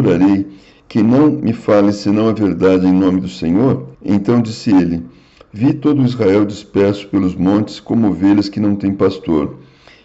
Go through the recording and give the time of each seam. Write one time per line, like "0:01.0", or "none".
0:03.9